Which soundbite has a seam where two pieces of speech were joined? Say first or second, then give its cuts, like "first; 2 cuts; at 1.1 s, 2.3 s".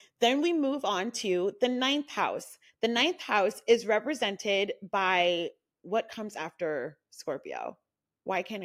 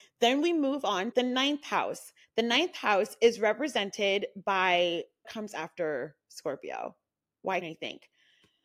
second; 3 cuts; at 1.1 s, 5.2 s, 7.6 s